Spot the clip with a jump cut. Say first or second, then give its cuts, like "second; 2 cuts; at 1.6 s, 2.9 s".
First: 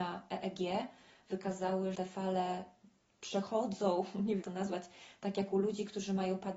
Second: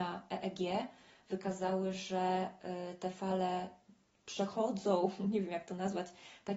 first; 2 cuts; at 1.9 s, 4.4 s